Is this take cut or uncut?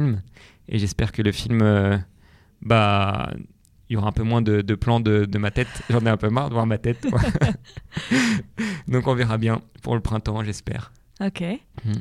uncut